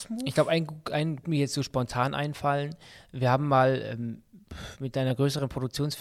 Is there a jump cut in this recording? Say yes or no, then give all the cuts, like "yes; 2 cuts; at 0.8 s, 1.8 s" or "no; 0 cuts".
yes; 1 cut; at 1.2 s